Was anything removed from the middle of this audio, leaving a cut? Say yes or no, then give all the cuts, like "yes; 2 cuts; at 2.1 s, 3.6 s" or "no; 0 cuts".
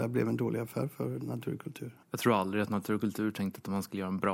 yes; 1 cut; at 2.0 s